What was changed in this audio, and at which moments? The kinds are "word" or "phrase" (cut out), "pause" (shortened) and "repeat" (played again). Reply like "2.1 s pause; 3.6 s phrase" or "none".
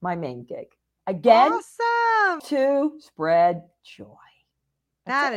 2.4 s word